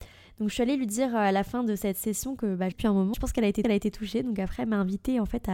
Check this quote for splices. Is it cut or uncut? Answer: cut